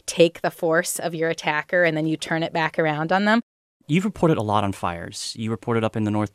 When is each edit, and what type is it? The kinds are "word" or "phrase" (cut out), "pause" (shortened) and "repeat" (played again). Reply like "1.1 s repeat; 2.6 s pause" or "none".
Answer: none

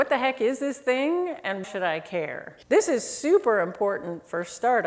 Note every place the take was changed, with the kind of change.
1.6 s word; 2.6 s pause

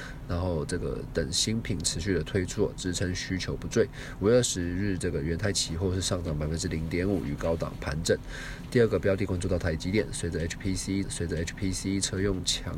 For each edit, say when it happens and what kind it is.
11.0 s repeat

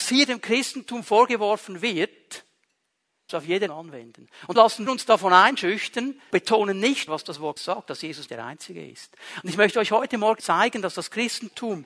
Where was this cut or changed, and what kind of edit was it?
3.3 s word; 3.7 s word; 4.5 s word; 4.9 s word; 6.3 s word; 7.1 s word; 7.6 s word; 8.3 s word; 10.4 s word

